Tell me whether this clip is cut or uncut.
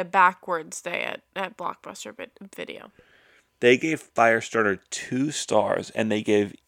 uncut